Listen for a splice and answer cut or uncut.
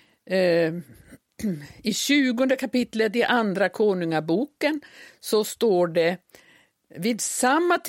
uncut